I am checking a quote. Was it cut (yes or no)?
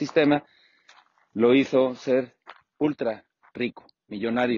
no